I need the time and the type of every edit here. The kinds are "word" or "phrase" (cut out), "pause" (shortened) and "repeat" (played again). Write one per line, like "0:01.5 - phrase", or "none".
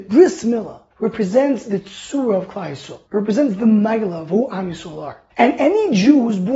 0:00.9 - pause
0:03.1 - pause
0:05.3 - pause